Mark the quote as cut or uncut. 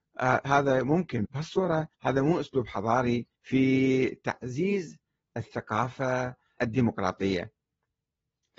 cut